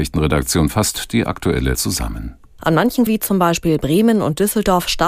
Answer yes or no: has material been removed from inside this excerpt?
yes